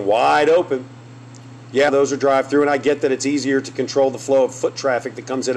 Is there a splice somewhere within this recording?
yes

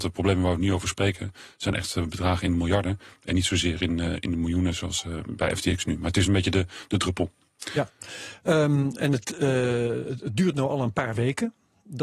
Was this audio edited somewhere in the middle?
no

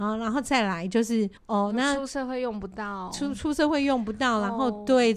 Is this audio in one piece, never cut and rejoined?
no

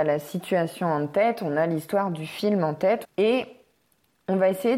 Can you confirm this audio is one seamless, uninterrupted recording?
no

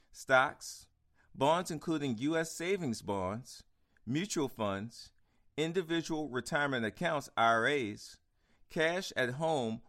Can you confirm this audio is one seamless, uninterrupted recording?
yes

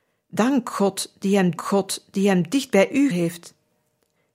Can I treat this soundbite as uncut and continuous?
no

